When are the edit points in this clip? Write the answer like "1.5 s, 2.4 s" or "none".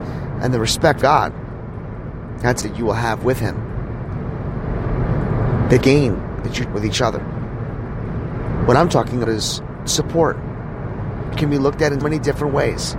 1.0 s, 2.6 s, 5.8 s, 6.7 s, 9.2 s, 9.9 s, 11.3 s, 12.0 s